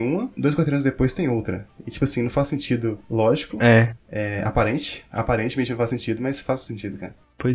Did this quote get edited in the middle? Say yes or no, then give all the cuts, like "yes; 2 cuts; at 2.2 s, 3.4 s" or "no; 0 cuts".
no; 0 cuts